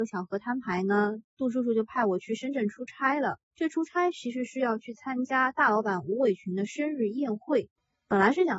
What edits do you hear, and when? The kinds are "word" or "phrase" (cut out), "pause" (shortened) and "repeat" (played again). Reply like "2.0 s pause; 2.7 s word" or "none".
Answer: 3.4 s pause